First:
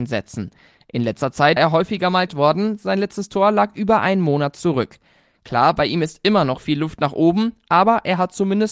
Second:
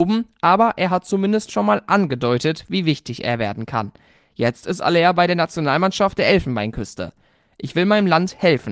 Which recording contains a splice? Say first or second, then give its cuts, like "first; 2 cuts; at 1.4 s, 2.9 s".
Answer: first; 2 cuts; at 1.6 s, 2.3 s